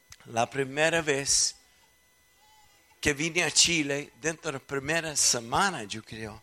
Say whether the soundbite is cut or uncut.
uncut